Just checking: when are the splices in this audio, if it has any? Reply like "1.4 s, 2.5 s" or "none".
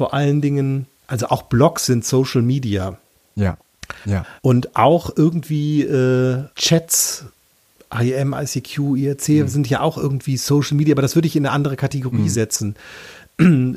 0.9 s, 4.4 s, 6.5 s